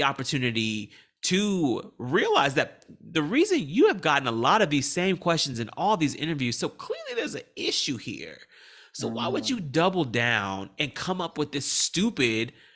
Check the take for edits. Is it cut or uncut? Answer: uncut